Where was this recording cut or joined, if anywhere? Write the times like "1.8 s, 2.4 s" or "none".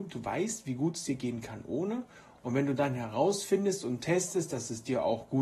none

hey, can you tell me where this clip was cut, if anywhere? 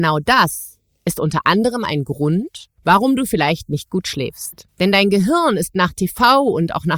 2.8 s, 4.7 s

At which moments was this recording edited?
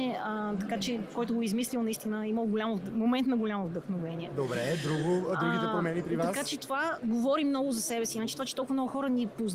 6.6 s

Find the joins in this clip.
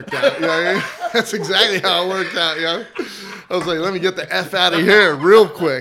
none

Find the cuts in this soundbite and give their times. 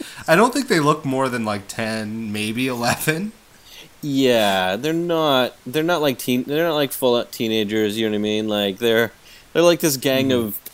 none

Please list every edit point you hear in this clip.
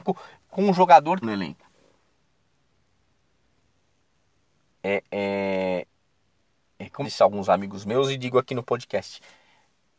1.2 s, 7.0 s

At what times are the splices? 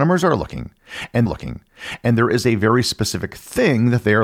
1.3 s

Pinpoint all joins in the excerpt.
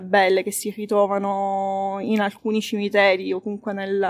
none

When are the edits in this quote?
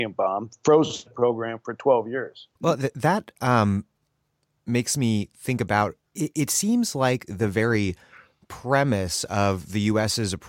2.6 s, 6.1 s

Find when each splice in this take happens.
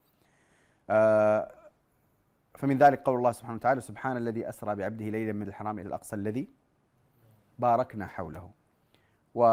5.4 s, 5.8 s

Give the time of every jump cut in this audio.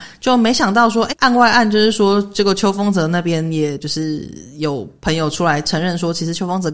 1.1 s

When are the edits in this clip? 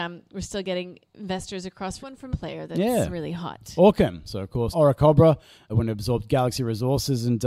2.0 s, 2.3 s, 4.7 s, 5.7 s

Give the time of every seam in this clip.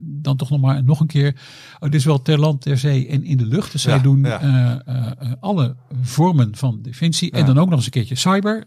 none

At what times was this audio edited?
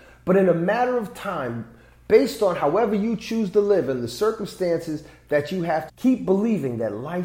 5.9 s

